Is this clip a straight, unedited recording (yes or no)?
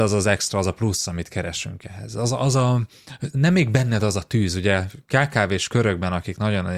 yes